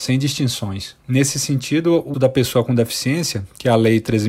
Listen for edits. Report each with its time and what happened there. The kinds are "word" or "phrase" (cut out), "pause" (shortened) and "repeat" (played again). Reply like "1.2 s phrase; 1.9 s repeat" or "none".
2.1 s word